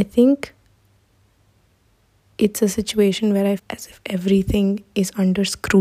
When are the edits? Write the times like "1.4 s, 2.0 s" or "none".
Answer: 3.6 s